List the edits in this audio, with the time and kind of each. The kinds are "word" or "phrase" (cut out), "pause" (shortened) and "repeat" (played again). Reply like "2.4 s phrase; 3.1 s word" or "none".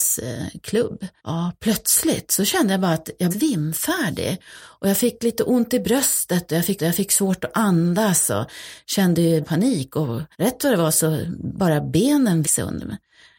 1.2 s pause; 3.3 s phrase; 6.8 s repeat; 9.4 s word; 10.3 s pause; 12.4 s word

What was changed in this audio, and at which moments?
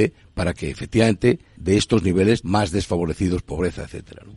1.6 s word; 2.4 s word

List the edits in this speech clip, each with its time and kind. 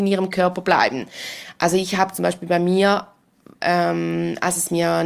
none

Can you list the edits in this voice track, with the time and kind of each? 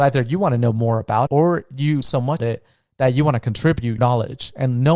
1.3 s word; 2.0 s word; 2.4 s word; 4.0 s word

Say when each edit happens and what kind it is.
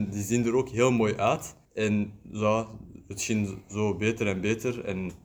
1.6 s pause

